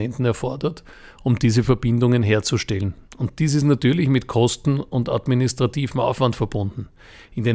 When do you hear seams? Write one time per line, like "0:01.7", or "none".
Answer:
none